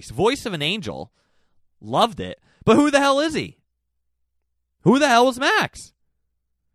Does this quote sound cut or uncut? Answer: uncut